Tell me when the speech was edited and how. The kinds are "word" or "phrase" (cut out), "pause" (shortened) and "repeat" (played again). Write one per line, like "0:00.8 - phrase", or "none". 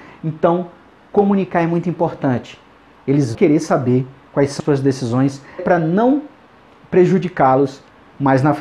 0:03.3 - word
0:04.6 - word
0:05.6 - word